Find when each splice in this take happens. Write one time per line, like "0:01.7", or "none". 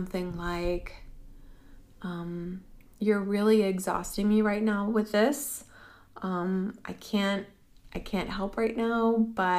0:02.9